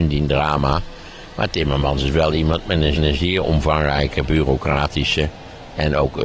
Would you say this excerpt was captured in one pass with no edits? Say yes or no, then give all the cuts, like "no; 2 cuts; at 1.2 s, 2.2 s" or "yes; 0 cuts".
no; 1 cut; at 3.0 s